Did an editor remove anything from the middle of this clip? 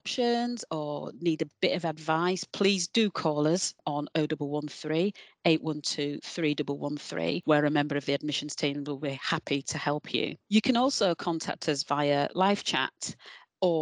yes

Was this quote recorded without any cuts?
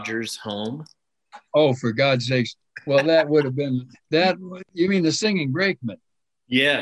no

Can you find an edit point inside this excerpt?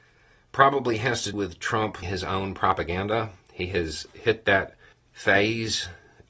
yes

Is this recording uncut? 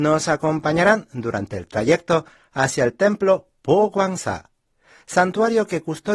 yes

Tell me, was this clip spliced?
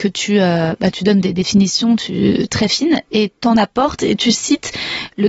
no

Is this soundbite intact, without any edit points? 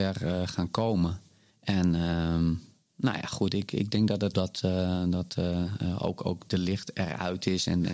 no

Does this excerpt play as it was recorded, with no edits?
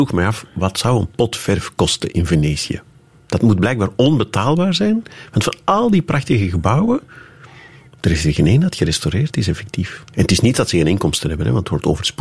yes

